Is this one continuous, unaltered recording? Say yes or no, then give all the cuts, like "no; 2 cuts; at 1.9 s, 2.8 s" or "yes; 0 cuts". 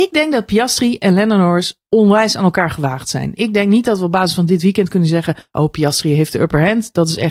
yes; 0 cuts